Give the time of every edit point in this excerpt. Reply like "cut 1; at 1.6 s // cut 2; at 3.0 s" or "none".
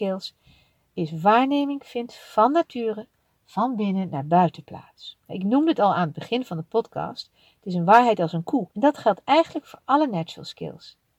cut 1; at 5.2 s // cut 2; at 8.7 s